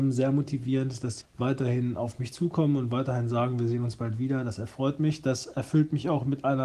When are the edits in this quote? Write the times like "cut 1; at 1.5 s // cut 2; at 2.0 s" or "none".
cut 1; at 1.2 s